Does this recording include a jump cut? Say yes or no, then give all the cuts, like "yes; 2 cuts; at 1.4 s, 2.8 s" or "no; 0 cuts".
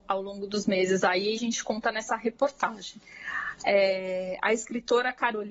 yes; 1 cut; at 1.4 s